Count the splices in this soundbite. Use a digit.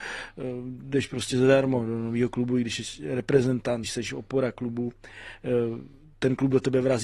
1